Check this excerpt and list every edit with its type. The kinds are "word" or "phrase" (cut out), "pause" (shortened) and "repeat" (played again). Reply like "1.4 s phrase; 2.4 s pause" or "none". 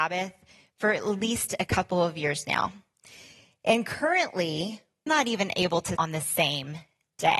5.1 s word; 6.0 s word

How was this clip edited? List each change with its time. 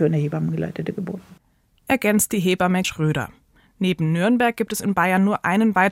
2.8 s word

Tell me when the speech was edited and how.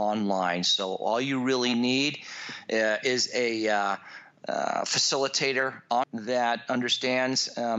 6.0 s word

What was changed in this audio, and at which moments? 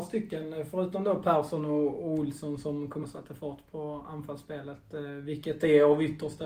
3.0 s word

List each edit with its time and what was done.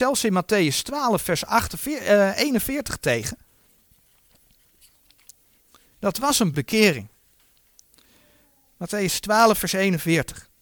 6.5 s word

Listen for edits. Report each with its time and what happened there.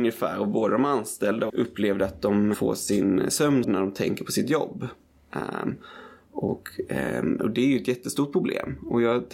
1.5 s phrase; 2.5 s word; 3.6 s word

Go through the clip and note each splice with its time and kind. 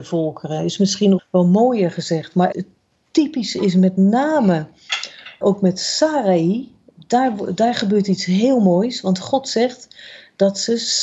1.2 s word; 2.5 s word; 5.4 s word

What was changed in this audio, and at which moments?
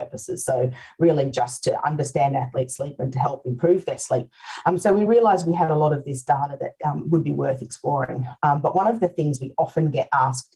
none

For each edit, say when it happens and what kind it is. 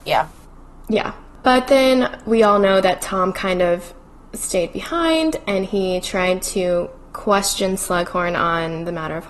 none

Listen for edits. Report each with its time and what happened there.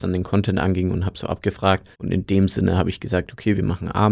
1.9 s pause

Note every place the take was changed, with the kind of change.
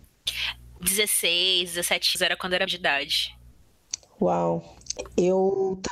2.1 s word; 2.7 s word

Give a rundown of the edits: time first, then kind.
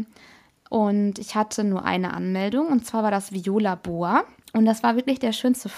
none

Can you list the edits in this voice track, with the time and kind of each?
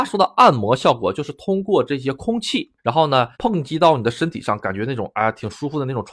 2.8 s pause; 3.3 s pause

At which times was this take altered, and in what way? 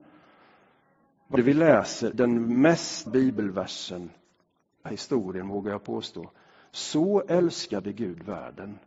1.4 s word; 2.1 s word; 3.1 s word; 4.9 s word

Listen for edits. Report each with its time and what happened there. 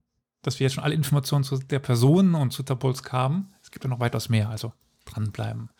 none

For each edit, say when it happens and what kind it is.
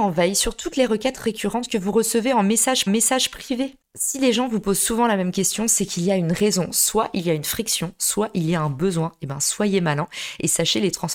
2.9 s repeat

